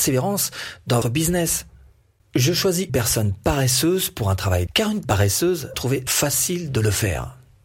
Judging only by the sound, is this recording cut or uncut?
cut